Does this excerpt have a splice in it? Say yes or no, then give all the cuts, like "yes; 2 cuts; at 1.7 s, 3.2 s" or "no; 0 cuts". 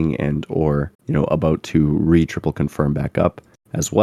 yes; 1 cut; at 0.9 s